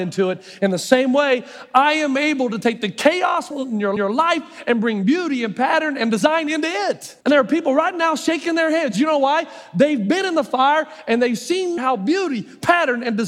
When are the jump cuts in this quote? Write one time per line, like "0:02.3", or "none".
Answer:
0:03.5
0:04.0
0:07.2
0:11.8